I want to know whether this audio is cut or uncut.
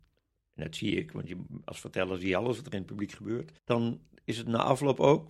cut